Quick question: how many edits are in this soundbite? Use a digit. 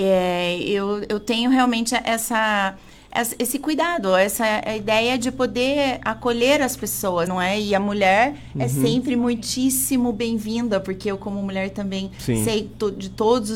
1